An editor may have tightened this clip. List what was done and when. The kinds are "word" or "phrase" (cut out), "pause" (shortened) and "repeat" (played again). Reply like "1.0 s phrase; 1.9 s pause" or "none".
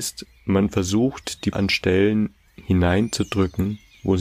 1.5 s word